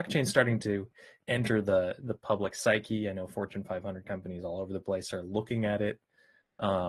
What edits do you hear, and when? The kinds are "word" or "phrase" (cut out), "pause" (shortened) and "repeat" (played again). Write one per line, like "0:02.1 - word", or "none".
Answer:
none